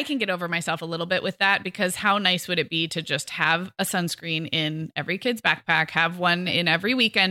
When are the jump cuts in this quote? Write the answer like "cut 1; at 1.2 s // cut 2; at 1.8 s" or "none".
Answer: none